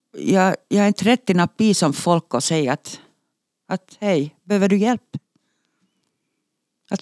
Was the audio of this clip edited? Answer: no; 0 cuts

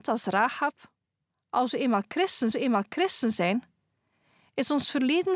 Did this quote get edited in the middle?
yes; 1 cut; at 2.5 s

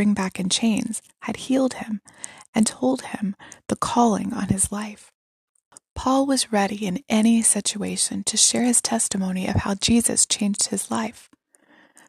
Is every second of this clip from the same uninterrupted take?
yes; 0 cuts

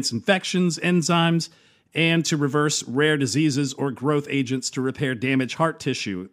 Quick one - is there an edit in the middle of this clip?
no; 0 cuts

